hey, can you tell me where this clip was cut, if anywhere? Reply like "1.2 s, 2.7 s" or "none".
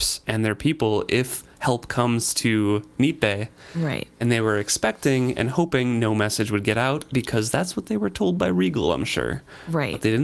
none